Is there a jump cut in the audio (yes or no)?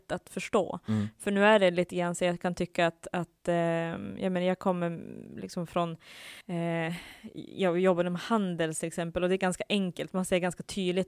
yes